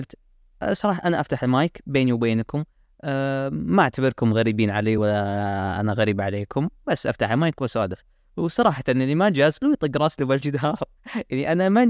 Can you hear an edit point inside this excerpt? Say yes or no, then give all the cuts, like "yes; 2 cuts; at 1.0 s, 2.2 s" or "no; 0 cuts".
no; 0 cuts